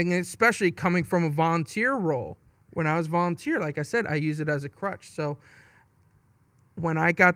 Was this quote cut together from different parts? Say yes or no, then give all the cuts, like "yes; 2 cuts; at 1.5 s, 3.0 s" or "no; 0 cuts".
no; 0 cuts